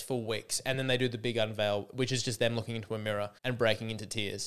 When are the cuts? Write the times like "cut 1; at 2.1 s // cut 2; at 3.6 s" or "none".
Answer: cut 1; at 3.4 s